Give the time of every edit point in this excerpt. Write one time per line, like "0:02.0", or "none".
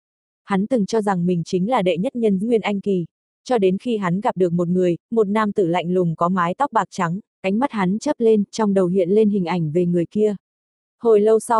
0:02.4
0:03.2
0:07.3